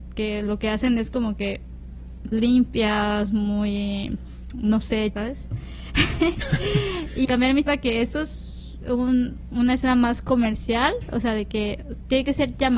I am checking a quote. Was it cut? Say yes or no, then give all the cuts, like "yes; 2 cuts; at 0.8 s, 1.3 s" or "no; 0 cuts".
yes; 4 cuts; at 2.3 s, 5.1 s, 7.2 s, 7.6 s